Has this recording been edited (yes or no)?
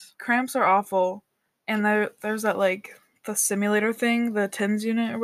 no